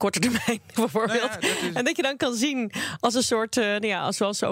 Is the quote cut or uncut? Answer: uncut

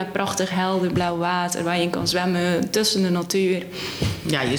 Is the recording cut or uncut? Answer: uncut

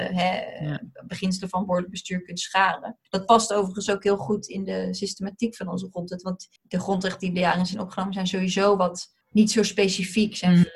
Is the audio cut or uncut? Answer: cut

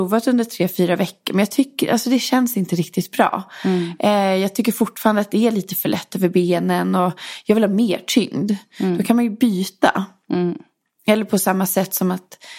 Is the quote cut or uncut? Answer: uncut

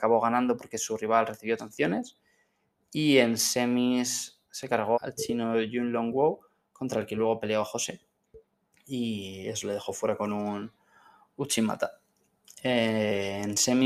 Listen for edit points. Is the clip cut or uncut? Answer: cut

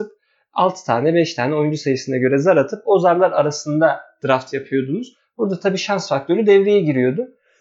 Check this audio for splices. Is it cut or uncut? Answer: uncut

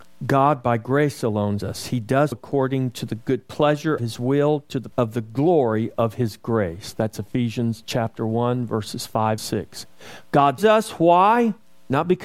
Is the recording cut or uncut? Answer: cut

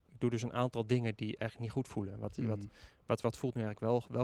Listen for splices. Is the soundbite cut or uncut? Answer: uncut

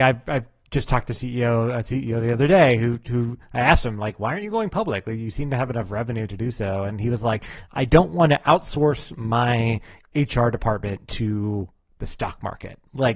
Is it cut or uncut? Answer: uncut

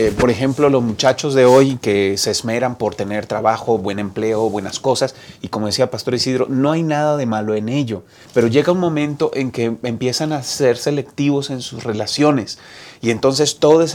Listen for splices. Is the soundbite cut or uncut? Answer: cut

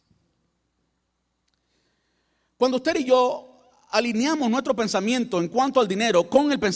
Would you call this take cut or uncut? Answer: uncut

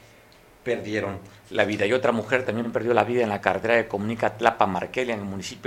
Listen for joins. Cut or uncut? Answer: uncut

